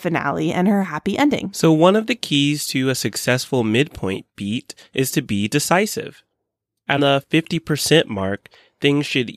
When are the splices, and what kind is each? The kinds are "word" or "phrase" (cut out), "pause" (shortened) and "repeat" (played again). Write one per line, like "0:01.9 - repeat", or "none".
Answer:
0:07.0 - word